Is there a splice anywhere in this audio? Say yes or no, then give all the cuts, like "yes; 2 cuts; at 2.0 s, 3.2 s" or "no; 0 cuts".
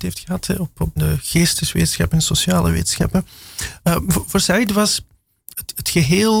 yes; 2 cuts; at 1.0 s, 5.5 s